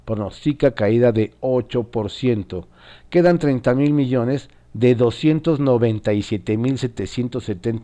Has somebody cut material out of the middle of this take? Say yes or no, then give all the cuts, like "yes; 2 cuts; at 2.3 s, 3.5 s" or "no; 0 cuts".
no; 0 cuts